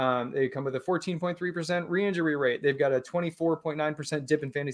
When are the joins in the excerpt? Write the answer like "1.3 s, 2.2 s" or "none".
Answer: none